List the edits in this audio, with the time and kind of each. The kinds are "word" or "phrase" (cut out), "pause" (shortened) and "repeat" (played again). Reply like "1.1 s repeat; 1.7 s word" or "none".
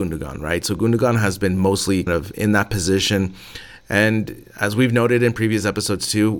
2.1 s word